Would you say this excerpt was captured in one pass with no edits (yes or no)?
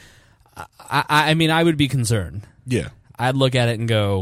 yes